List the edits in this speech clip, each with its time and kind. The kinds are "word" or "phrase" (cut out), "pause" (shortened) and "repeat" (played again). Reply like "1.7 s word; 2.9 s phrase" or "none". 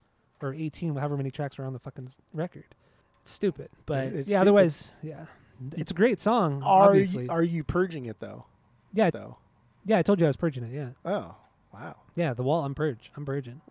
9.1 s repeat